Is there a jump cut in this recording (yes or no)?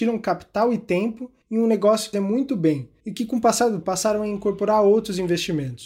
yes